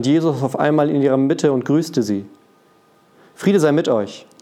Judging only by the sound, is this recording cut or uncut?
uncut